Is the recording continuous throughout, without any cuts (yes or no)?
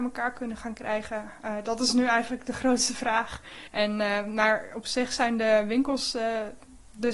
no